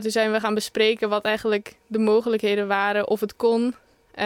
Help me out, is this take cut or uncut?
uncut